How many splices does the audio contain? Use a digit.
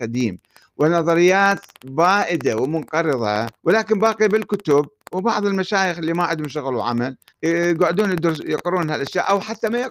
2